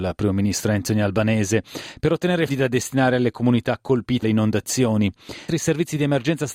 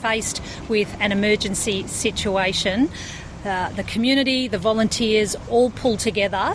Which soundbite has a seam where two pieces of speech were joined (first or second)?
first